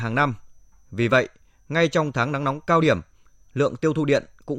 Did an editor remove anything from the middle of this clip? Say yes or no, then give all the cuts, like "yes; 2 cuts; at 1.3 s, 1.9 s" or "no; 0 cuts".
no; 0 cuts